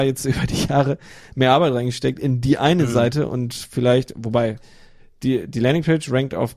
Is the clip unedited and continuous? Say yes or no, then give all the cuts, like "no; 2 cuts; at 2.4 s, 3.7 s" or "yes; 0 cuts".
yes; 0 cuts